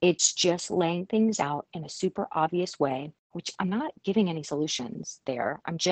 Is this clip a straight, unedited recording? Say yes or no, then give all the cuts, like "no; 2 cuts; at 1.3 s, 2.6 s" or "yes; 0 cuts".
yes; 0 cuts